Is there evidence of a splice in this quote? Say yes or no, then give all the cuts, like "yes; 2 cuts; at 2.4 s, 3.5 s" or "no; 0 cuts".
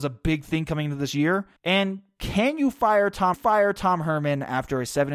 yes; 2 cuts; at 1.6 s, 3.3 s